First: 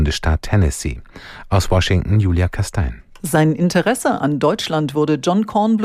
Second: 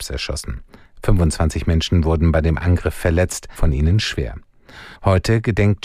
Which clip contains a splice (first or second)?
second